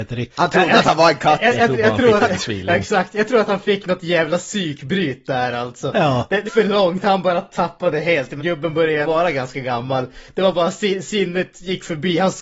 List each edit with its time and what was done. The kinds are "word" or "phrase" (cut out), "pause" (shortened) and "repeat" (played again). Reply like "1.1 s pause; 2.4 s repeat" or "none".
6.5 s word; 8.4 s word; 9.0 s word